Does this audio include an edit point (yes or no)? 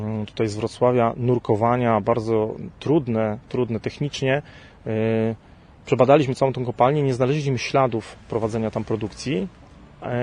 no